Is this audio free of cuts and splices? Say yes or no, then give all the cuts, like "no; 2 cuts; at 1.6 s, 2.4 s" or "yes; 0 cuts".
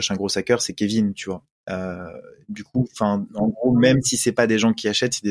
yes; 0 cuts